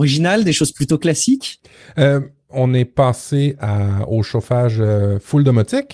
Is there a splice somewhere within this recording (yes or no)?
no